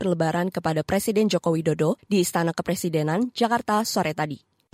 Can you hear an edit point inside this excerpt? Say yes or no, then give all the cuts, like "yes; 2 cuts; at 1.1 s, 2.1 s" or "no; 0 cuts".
yes; 1 cut; at 2.0 s